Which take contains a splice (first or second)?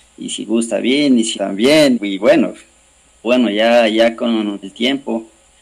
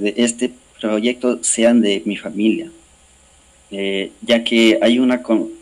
first